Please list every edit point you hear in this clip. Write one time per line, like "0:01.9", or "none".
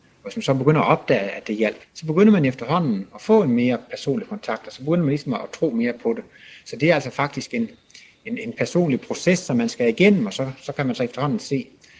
0:01.9